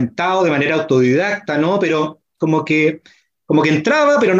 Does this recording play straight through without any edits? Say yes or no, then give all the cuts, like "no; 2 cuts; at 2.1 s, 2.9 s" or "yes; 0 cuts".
yes; 0 cuts